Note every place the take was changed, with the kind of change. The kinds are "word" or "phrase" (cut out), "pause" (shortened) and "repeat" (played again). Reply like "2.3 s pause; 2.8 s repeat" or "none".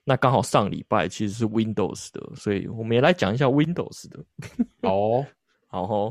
none